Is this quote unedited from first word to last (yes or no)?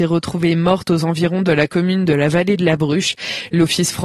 yes